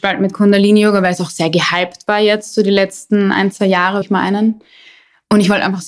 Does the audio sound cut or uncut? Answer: cut